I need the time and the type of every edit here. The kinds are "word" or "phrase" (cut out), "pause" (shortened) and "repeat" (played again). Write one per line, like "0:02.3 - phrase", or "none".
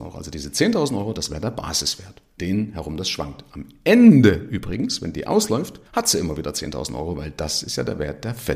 0:02.4 - word
0:05.8 - pause